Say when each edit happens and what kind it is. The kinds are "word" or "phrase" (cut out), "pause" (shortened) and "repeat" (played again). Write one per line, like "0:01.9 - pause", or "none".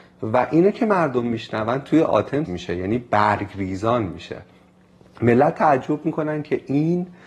0:02.5 - word